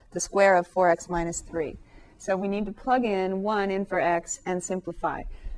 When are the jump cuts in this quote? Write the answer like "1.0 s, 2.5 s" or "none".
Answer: none